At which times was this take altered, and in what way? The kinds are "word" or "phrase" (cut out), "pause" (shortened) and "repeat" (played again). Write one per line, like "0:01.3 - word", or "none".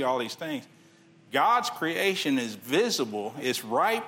none